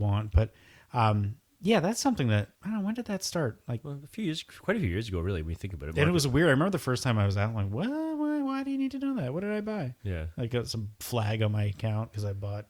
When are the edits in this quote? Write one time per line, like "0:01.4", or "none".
0:02.5
0:10.0